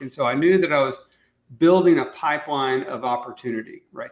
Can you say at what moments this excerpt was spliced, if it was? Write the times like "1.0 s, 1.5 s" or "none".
none